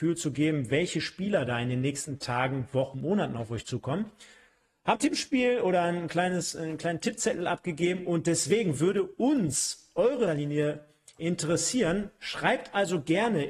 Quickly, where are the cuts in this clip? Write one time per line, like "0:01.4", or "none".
0:02.9
0:04.9
0:10.3